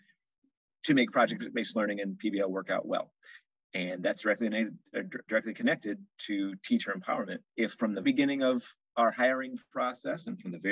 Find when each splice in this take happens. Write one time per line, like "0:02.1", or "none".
0:07.5
0:08.0